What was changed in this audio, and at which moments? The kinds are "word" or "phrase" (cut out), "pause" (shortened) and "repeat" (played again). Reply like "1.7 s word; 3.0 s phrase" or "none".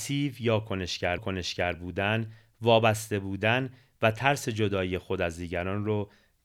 1.2 s repeat